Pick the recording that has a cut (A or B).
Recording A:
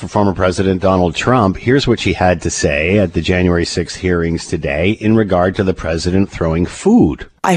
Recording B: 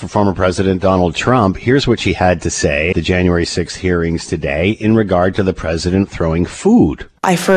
B